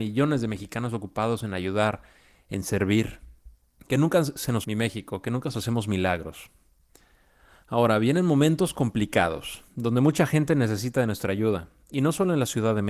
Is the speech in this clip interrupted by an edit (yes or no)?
yes